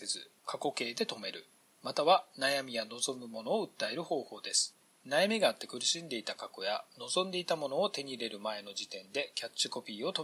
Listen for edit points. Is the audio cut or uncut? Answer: uncut